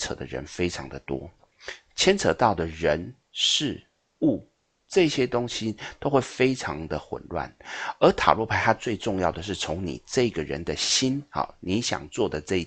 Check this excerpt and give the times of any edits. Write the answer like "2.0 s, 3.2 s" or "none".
none